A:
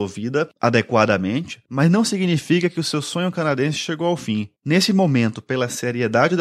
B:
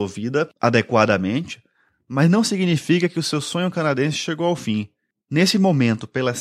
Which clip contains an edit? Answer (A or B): A